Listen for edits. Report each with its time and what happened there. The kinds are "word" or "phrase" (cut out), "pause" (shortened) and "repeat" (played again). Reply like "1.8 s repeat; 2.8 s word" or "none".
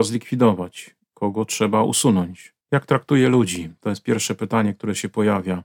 2.6 s pause